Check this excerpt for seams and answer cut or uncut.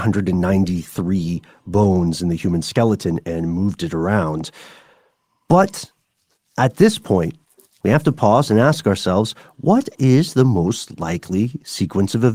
uncut